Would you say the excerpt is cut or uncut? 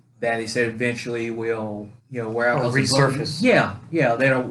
cut